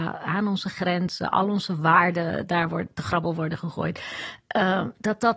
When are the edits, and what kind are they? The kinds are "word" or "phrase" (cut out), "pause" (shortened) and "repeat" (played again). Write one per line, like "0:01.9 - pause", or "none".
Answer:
none